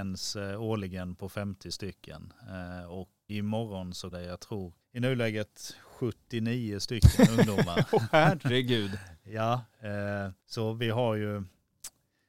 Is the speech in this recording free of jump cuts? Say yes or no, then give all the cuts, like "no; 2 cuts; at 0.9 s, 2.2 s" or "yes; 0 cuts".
no; 4 cuts; at 3.3 s, 4.1 s, 4.8 s, 10.4 s